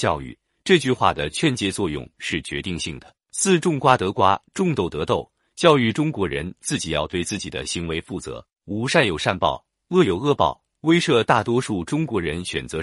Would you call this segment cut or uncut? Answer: cut